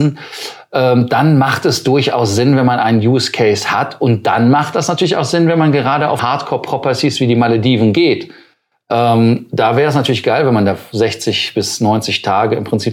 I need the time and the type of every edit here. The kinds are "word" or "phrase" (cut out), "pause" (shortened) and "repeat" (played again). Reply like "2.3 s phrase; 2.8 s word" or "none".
6.2 s word